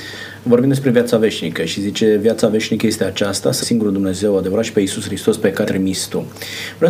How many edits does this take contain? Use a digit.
2